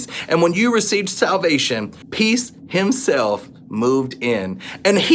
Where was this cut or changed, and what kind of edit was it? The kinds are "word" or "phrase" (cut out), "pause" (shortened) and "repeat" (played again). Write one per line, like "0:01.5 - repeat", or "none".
0:02.0 - pause